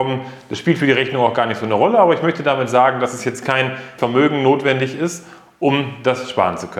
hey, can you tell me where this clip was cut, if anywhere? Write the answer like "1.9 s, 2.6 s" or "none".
4.0 s